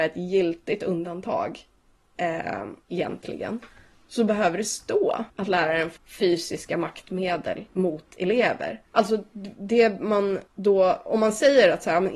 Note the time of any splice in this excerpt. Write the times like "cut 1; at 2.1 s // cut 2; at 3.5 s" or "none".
cut 1; at 2.8 s // cut 2; at 5.3 s // cut 3; at 6.0 s // cut 4; at 7.7 s // cut 5; at 8.9 s // cut 6; at 10.5 s